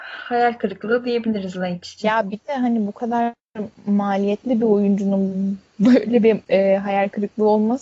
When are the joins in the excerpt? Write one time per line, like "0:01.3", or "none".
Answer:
0:03.8